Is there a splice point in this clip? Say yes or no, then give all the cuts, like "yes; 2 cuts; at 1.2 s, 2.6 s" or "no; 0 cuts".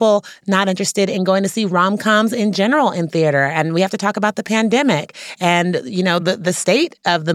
no; 0 cuts